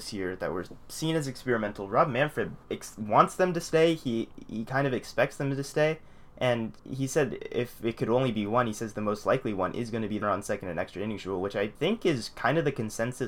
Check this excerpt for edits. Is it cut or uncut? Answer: cut